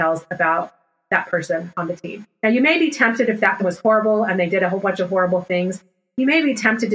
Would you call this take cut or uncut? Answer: cut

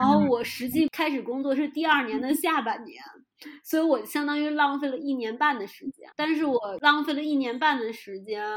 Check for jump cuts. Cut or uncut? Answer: cut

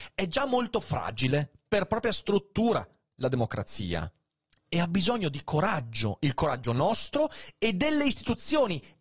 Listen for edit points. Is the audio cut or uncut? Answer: uncut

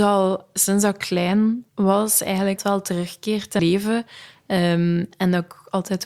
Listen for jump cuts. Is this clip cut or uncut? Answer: cut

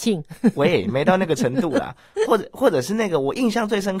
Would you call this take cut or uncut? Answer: uncut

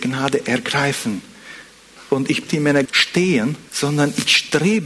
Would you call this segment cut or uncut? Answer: cut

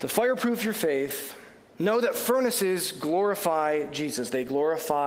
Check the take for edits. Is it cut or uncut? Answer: uncut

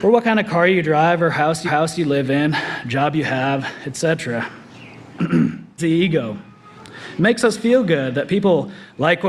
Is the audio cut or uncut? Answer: cut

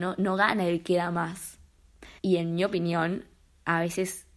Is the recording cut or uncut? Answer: cut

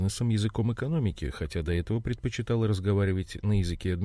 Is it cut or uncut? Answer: uncut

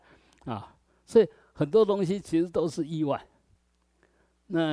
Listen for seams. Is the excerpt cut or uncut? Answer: uncut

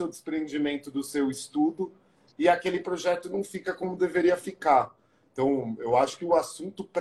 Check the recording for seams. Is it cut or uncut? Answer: uncut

